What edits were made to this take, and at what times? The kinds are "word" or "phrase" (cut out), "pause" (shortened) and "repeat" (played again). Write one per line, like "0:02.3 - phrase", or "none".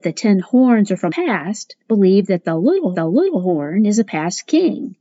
0:01.1 - word
0:01.8 - pause
0:02.9 - repeat